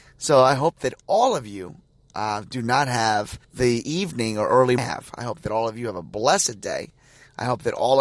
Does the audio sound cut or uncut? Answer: cut